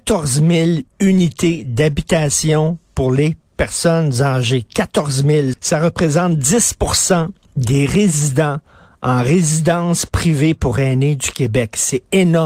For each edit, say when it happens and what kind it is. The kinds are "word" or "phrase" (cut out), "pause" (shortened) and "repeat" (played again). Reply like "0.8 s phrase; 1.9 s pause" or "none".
5.5 s word